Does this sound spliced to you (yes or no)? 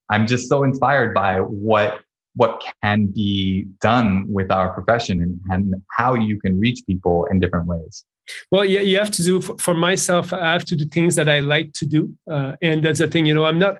no